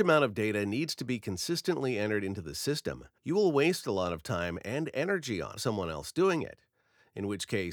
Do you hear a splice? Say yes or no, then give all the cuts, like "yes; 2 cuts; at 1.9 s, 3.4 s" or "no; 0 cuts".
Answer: yes; 2 cuts; at 3.2 s, 5.6 s